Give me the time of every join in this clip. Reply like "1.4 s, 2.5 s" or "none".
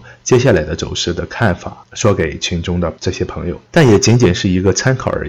3.7 s